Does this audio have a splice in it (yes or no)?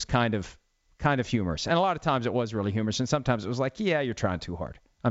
no